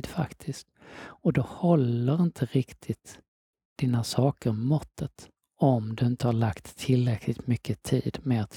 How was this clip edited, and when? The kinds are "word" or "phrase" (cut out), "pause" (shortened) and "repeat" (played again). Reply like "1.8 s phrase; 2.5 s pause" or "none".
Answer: 3.5 s pause; 5.4 s pause

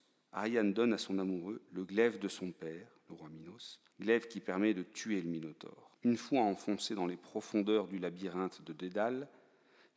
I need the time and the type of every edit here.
3.9 s pause; 5.9 s pause

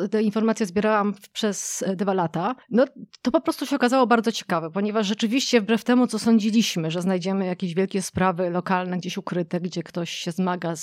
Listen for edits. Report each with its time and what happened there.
2.6 s pause

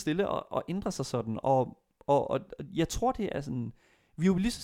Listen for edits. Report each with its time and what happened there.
none

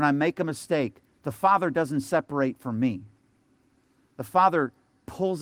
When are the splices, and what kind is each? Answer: none

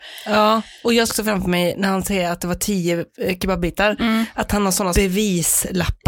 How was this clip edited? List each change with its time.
1.1 s word; 4.9 s word

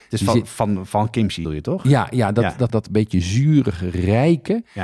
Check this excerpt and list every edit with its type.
1.4 s phrase; 2.7 s word

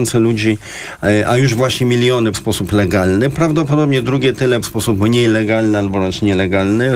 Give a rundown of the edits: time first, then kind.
2.3 s word; 4.6 s word

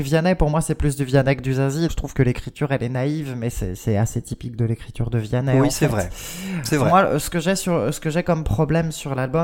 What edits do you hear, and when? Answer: 1.9 s word

